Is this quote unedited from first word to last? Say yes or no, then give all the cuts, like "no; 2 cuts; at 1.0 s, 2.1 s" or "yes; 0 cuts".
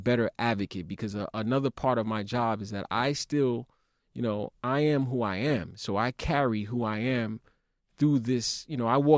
yes; 0 cuts